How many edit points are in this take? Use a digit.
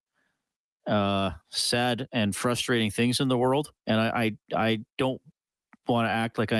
2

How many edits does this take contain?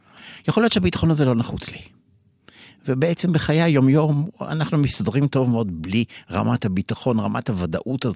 0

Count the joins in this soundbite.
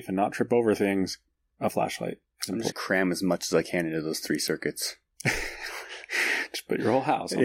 1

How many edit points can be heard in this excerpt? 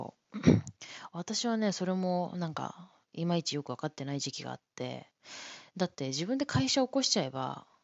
1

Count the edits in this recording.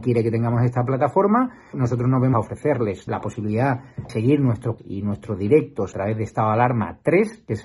6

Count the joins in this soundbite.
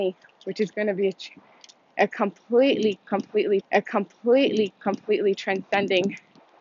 1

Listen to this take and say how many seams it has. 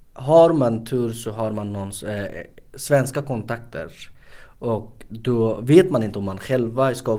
0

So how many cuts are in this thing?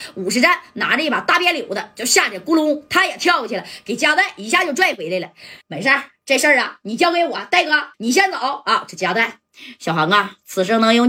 2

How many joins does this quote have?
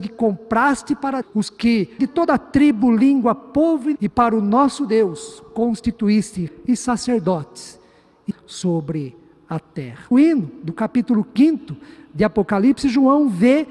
6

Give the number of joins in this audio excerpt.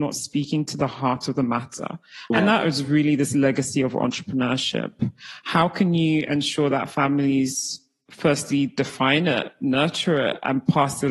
0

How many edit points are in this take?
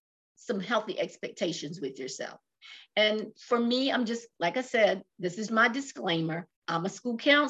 3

